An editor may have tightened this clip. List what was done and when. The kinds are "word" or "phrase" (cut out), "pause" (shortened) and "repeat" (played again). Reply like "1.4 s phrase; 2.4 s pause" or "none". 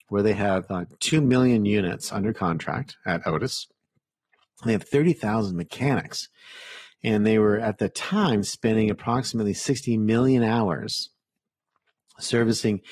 none